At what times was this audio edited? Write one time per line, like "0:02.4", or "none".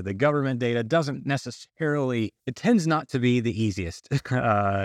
0:02.4